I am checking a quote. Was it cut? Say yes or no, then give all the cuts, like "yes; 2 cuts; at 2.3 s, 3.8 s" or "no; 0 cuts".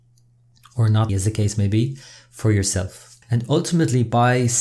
yes; 2 cuts; at 1.1 s, 3.2 s